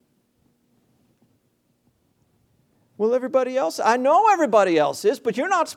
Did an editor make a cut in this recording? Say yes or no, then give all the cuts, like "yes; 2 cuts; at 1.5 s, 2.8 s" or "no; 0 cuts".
no; 0 cuts